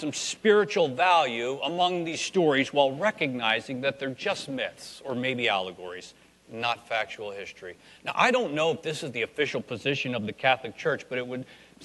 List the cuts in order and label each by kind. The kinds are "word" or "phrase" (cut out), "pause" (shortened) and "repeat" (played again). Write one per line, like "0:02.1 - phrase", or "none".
none